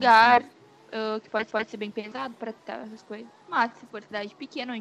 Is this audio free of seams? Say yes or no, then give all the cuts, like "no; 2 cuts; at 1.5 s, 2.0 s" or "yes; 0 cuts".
no; 3 cuts; at 1.5 s, 2.6 s, 3.4 s